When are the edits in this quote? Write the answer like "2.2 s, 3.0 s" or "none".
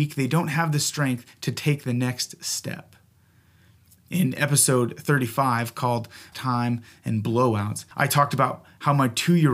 6.3 s, 7.9 s